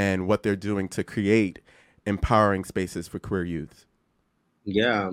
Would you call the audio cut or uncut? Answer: uncut